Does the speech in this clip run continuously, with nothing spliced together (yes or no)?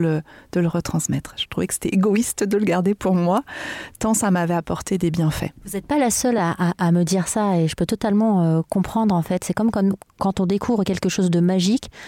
yes